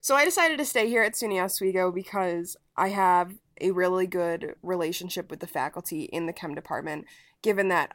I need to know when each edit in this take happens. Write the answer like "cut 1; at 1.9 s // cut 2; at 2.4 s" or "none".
none